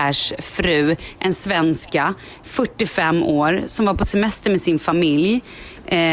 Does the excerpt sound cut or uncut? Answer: uncut